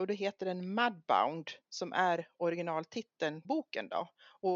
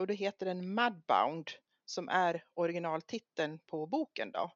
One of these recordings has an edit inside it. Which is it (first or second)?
first